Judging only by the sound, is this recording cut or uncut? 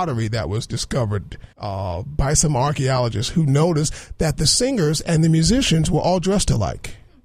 cut